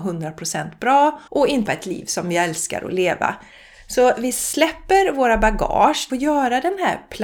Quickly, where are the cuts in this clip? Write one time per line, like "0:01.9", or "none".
0:01.3
0:01.7
0:06.1

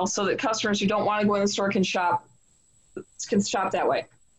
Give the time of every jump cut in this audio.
none

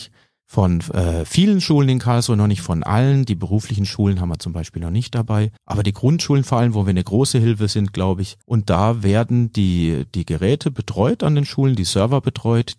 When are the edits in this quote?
0:05.6
0:08.4

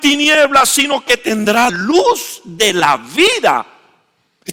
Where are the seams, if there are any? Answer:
0:01.7

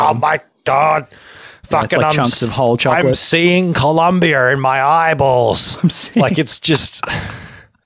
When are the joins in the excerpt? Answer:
none

